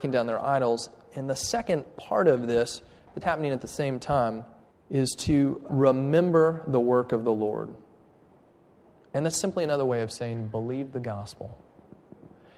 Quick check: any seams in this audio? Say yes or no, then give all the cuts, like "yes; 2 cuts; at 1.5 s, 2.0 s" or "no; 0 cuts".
yes; 3 cuts; at 3.2 s, 4.7 s, 5.7 s